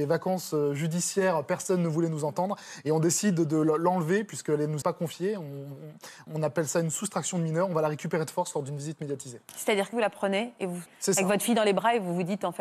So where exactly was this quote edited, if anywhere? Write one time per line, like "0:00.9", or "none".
0:04.8
0:06.3
0:09.9
0:10.9